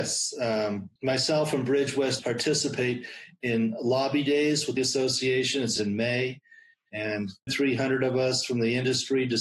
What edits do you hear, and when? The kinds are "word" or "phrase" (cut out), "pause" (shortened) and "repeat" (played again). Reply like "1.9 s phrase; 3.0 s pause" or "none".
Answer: 1.0 s pause; 2.2 s word; 4.8 s phrase; 5.8 s word; 7.5 s word